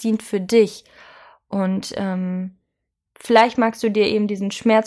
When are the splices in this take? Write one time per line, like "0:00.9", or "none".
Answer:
none

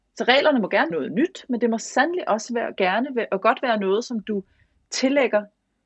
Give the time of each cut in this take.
0:00.9

